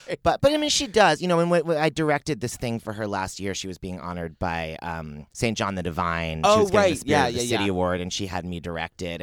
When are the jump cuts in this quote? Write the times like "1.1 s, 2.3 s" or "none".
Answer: 5.3 s